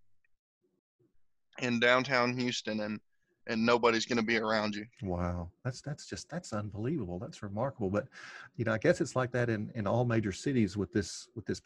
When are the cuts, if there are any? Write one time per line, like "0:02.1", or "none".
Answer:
0:04.9